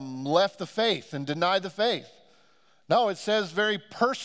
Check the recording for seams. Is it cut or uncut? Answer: uncut